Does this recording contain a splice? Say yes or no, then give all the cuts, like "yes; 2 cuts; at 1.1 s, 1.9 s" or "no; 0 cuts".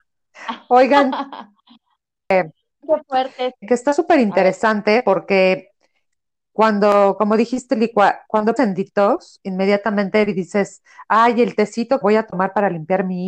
yes; 4 cuts; at 2.8 s, 3.6 s, 8.6 s, 12.0 s